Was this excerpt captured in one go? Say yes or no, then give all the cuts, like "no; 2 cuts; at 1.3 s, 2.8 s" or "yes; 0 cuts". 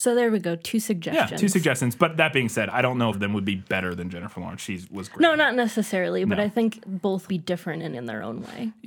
no; 3 cuts; at 3.1 s, 7.3 s, 7.9 s